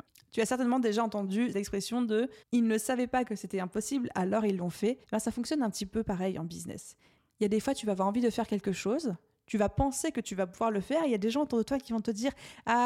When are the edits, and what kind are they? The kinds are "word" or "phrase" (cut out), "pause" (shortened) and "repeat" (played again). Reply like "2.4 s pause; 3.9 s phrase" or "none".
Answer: 1.5 s word; 2.4 s pause; 5.0 s pause